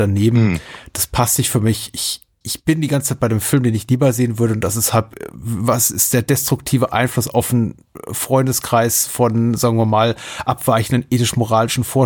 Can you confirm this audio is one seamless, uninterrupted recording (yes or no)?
yes